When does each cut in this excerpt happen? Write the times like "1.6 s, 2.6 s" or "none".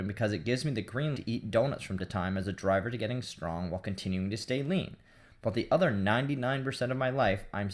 1.2 s, 2.0 s